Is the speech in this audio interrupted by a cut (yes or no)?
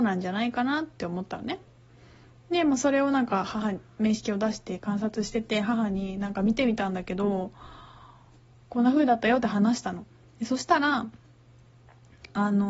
no